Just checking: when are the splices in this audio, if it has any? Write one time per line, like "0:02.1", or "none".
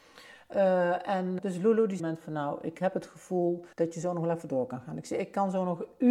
0:01.4
0:02.0
0:03.7

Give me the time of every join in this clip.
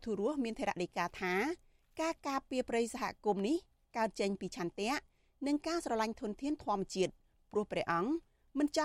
none

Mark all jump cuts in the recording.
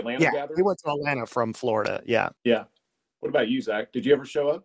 0:02.4

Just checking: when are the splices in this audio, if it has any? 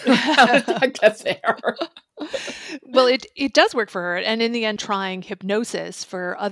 0:04.8

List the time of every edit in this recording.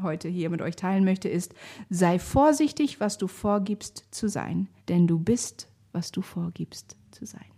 0:04.8

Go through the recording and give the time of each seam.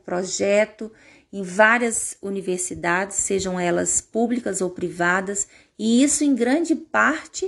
none

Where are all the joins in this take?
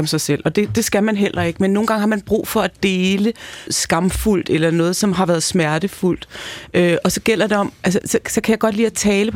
0:03.7
0:08.0

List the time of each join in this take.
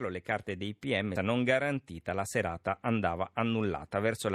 0:01.2

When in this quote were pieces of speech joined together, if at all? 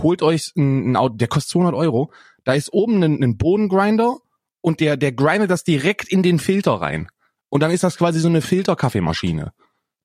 none

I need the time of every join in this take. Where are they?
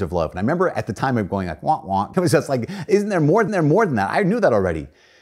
0:02.1
0:03.5

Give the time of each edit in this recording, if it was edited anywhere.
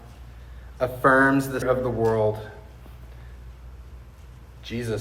0:01.6

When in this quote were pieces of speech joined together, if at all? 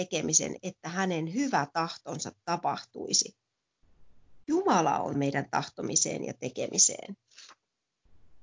0:05.1

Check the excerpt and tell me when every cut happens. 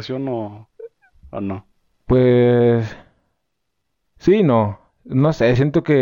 none

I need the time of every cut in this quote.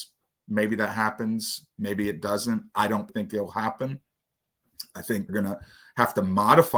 0:03.1
0:05.3

